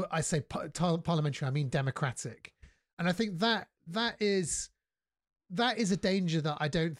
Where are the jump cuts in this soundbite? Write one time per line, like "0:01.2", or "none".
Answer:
none